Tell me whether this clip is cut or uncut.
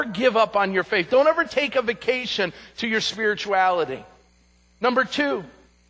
uncut